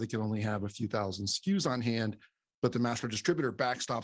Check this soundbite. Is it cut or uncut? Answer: uncut